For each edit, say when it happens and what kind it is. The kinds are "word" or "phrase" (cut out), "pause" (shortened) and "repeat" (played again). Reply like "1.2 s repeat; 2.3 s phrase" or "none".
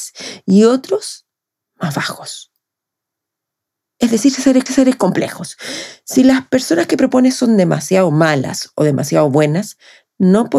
4.7 s repeat